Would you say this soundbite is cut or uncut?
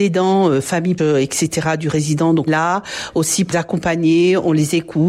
cut